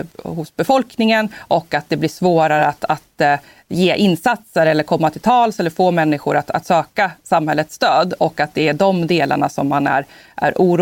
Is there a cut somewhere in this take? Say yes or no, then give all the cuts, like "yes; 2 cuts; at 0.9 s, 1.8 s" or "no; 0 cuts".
no; 0 cuts